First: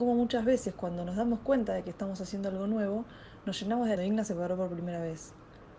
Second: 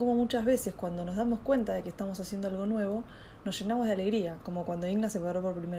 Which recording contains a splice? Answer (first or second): first